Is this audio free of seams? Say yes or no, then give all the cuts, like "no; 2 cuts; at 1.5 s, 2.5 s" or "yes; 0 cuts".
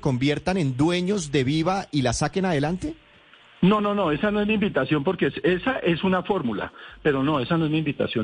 yes; 0 cuts